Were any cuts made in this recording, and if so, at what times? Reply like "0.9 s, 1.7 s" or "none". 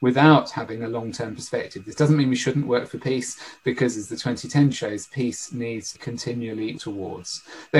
4.7 s, 5.9 s, 6.8 s